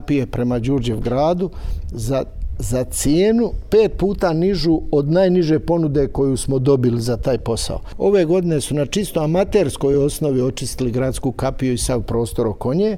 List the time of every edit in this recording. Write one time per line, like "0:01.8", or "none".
none

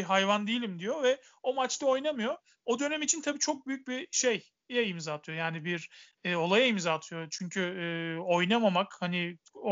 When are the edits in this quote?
none

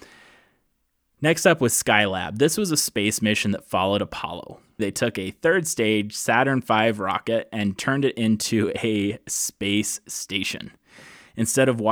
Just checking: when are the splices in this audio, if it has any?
0:04.8

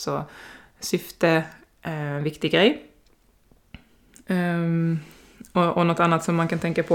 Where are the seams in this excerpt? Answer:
none

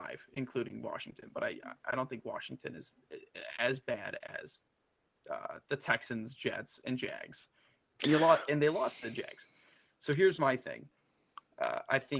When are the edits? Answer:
none

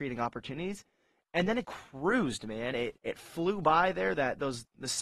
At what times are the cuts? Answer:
0:01.6
0:03.0

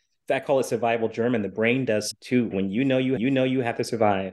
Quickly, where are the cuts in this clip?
0:02.1
0:02.5
0:03.2

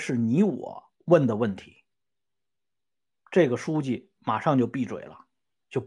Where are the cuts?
0:01.0
0:01.9

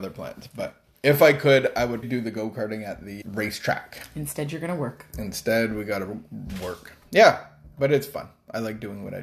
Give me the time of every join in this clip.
0:02.0
0:03.2

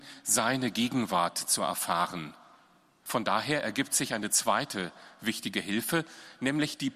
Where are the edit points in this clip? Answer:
none

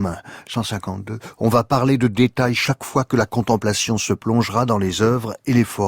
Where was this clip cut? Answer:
none

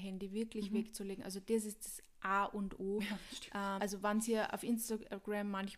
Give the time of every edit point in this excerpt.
0:03.8

